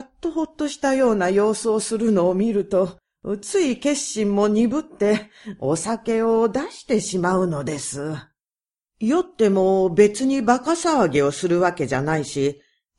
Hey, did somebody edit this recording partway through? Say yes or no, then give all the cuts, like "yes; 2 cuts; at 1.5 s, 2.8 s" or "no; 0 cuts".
no; 0 cuts